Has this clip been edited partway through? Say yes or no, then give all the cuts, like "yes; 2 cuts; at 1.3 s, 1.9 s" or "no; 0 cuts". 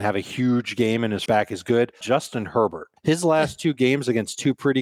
yes; 3 cuts; at 1.3 s, 2.0 s, 3.0 s